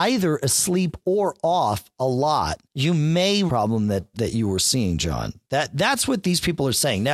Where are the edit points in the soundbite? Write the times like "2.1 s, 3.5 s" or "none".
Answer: 2.7 s, 3.5 s, 4.1 s